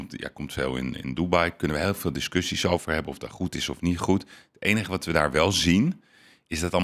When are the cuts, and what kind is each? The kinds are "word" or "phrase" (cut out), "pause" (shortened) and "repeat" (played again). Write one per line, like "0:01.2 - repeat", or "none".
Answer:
none